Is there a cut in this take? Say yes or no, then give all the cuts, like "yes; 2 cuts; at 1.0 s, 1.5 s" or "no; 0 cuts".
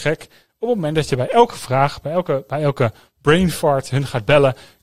no; 0 cuts